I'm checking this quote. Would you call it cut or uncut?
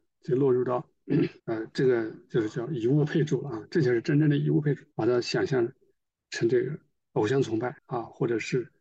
cut